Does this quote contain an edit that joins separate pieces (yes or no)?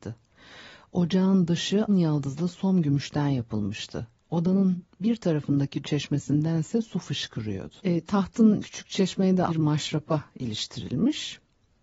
yes